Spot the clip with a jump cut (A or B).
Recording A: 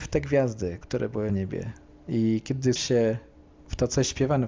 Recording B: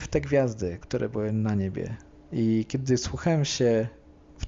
A